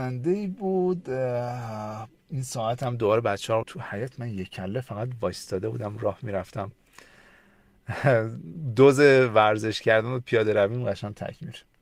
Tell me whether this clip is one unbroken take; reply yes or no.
no